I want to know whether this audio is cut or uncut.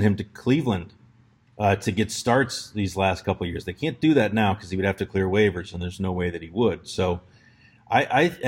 uncut